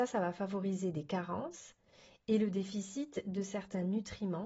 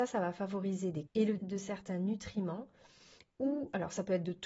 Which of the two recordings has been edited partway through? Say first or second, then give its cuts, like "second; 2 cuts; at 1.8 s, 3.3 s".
second; 2 cuts; at 1.1 s, 1.4 s